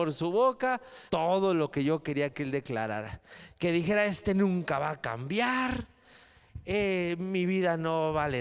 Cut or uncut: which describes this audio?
cut